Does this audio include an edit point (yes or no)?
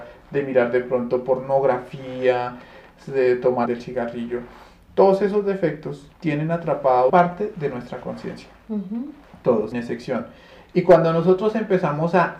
yes